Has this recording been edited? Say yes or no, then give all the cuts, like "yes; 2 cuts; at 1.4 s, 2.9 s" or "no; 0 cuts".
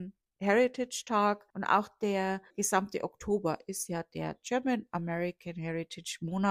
yes; 2 cuts; at 1.5 s, 2.5 s